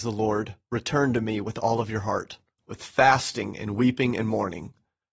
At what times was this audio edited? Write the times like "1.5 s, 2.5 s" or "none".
none